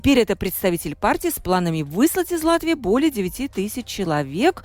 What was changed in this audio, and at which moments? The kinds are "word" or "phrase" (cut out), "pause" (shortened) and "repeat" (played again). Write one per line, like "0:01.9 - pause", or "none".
none